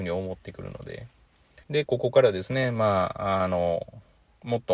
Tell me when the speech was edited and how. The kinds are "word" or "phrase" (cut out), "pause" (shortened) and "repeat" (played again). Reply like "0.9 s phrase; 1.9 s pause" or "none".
1.6 s pause